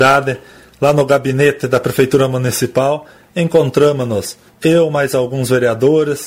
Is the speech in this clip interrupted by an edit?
no; 0 cuts

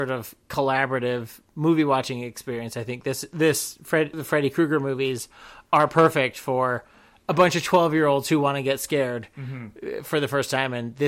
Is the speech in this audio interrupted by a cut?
no; 0 cuts

